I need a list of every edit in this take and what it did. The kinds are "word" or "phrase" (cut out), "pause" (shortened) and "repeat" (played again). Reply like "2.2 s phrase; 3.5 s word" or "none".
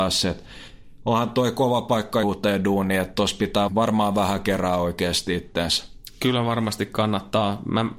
2.2 s phrase; 3.7 s word